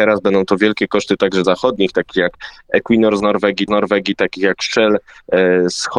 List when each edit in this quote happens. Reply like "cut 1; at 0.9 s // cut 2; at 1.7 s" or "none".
cut 1; at 1.4 s // cut 2; at 3.7 s